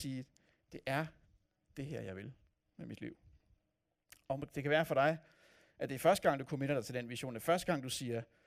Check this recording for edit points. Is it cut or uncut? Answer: uncut